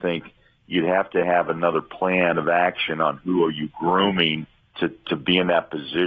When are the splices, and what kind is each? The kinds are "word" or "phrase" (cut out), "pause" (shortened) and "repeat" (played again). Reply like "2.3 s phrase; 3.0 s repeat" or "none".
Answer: 4.6 s pause